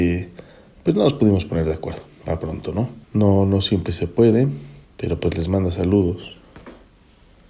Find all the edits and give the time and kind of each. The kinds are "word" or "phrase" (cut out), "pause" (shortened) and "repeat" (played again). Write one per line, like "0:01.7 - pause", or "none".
0:03.0 - pause
0:04.8 - pause